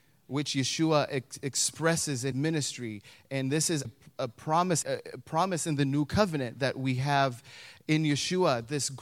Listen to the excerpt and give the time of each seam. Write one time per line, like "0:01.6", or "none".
0:02.3
0:03.8
0:04.8